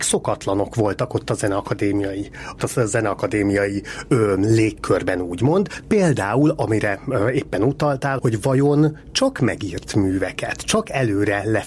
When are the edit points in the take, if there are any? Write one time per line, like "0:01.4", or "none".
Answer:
0:02.6
0:08.2